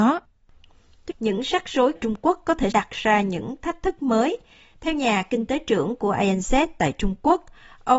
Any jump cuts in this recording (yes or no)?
yes